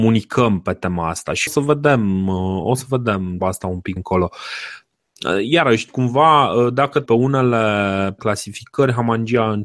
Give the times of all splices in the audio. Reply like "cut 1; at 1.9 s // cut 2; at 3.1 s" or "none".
cut 1; at 1.5 s // cut 2; at 3.4 s // cut 3; at 4.0 s // cut 4; at 5.9 s // cut 5; at 7.1 s // cut 6; at 8.2 s